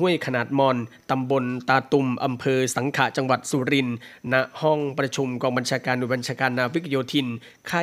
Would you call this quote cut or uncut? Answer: uncut